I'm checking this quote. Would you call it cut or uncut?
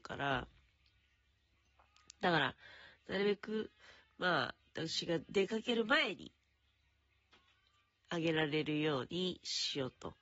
uncut